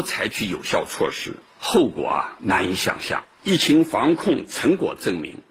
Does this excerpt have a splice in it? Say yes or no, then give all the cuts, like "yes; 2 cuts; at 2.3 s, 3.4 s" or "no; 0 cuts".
yes; 1 cut; at 3.3 s